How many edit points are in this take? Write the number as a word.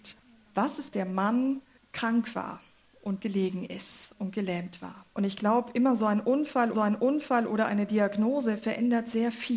five